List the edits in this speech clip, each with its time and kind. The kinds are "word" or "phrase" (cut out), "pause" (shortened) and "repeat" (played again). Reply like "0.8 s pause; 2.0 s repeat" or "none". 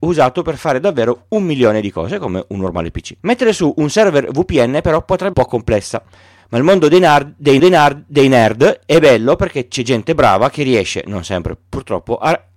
3.2 s pause; 5.3 s phrase; 7.6 s repeat